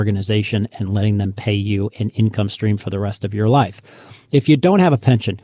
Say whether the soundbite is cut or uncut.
uncut